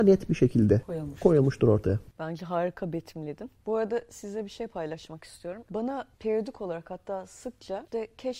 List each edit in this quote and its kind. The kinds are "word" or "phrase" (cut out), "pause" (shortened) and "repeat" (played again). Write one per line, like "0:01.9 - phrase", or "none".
0:06.1 - pause